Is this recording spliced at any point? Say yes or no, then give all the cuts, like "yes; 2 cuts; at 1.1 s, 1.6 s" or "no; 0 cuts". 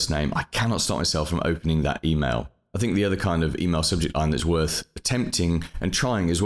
no; 0 cuts